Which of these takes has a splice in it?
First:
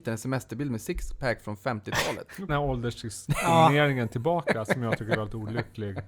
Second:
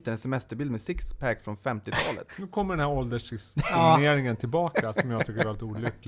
first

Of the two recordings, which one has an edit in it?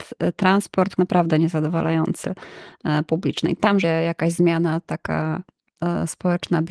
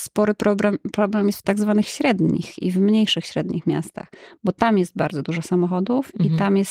first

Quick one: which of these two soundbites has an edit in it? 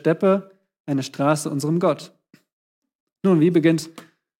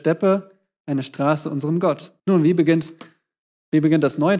second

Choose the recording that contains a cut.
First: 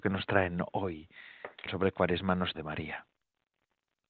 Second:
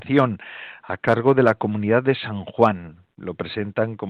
first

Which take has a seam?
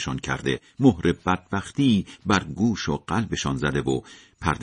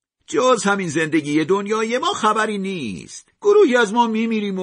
second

